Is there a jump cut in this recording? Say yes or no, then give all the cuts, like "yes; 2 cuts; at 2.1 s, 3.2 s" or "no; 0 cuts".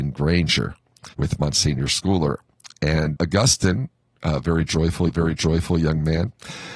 yes; 3 cuts; at 1.1 s, 3.2 s, 5.1 s